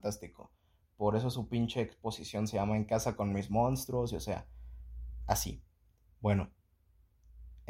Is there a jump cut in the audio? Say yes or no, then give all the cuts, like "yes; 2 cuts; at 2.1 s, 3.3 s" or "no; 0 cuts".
no; 0 cuts